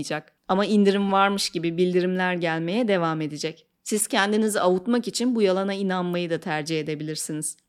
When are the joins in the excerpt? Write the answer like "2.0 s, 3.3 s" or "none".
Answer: none